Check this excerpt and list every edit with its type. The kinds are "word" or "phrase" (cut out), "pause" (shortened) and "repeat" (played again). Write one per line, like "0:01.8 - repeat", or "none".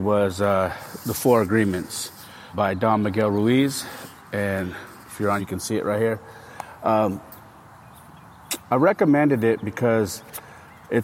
0:02.5 - word
0:05.0 - pause
0:05.4 - word